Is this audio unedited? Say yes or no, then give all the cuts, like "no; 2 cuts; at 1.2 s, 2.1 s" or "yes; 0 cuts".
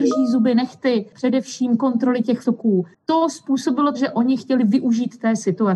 no; 2 cuts; at 2.4 s, 3.9 s